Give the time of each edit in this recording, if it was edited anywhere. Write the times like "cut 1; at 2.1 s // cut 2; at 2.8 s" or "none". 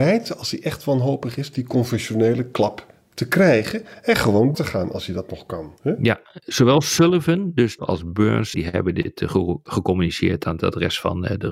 cut 1; at 4.5 s // cut 2; at 5.8 s // cut 3; at 7.8 s // cut 4; at 8.5 s